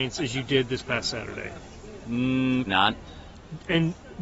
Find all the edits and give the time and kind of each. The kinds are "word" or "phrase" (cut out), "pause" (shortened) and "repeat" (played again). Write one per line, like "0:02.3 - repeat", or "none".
0:02.7 - word